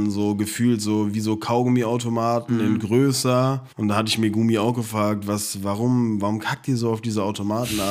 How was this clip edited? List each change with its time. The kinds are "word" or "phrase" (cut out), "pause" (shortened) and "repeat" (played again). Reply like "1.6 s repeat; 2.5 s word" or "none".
3.7 s pause